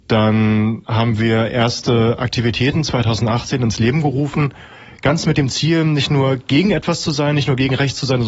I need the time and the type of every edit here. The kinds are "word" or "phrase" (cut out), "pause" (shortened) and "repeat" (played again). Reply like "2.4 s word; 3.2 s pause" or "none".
none